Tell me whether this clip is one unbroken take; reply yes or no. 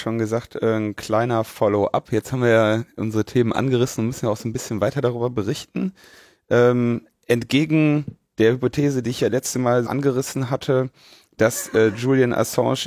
no